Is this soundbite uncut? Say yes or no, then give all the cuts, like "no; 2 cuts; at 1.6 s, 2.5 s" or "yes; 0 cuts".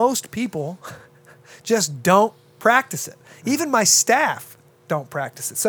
yes; 0 cuts